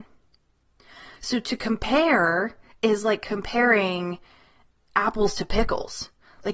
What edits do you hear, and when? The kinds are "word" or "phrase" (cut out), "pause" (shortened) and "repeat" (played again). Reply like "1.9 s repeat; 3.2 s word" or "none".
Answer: none